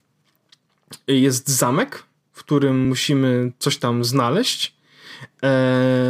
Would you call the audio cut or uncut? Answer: uncut